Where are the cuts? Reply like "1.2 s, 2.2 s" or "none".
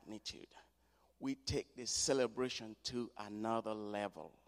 none